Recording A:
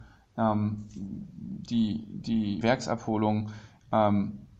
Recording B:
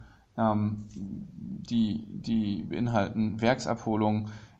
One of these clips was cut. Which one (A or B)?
A